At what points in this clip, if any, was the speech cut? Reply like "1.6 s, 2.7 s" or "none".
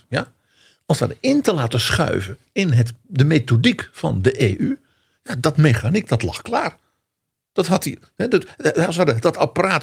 none